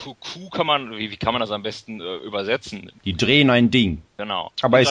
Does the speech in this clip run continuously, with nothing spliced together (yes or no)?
yes